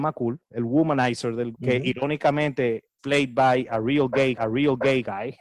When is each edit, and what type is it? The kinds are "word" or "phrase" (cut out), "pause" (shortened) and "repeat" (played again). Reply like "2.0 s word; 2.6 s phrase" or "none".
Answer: 1.5 s word; 3.0 s word; 4.4 s repeat